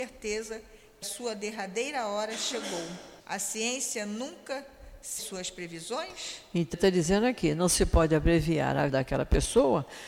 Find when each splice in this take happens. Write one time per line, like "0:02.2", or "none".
0:01.0
0:03.2
0:05.2
0:06.7
0:08.9